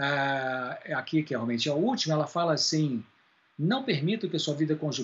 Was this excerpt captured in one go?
yes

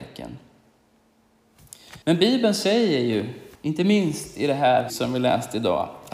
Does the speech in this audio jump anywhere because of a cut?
yes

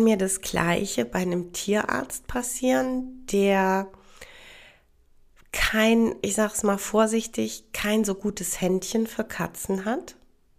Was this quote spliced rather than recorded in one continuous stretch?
no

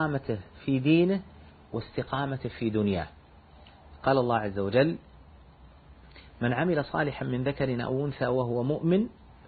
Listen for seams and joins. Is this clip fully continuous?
yes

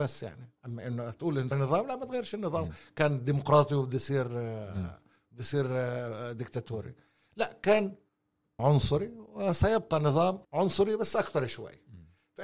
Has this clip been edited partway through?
yes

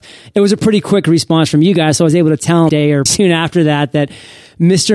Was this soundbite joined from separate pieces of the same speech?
yes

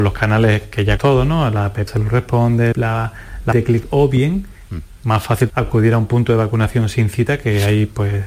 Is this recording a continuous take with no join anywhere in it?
no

